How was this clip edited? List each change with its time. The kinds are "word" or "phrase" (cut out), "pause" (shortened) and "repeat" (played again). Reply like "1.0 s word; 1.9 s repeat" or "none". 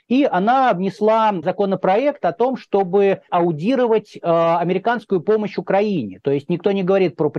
1.4 s word; 3.3 s word